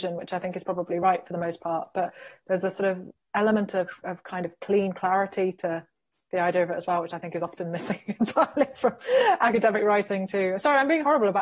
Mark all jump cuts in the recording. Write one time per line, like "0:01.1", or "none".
none

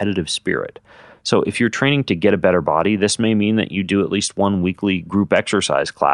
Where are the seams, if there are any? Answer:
none

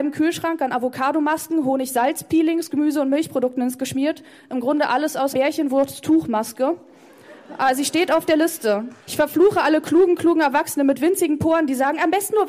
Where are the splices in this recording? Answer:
0:02.7
0:03.8
0:05.3
0:09.0

